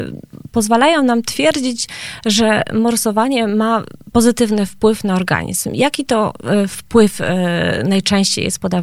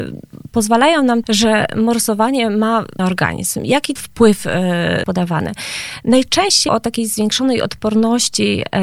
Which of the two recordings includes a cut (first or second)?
second